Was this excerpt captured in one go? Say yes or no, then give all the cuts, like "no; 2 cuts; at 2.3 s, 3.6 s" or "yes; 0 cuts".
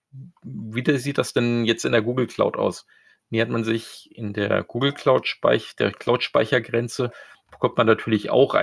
yes; 0 cuts